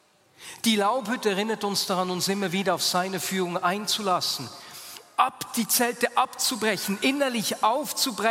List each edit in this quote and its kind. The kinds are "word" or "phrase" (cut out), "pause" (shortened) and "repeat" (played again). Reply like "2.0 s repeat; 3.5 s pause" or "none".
none